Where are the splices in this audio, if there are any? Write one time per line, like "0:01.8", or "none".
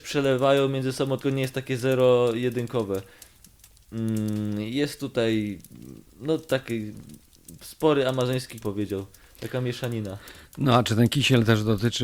0:01.2
0:08.6